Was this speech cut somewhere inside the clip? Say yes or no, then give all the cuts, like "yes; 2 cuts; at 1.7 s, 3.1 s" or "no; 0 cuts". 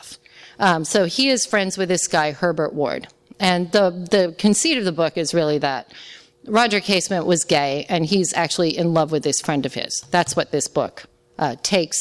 no; 0 cuts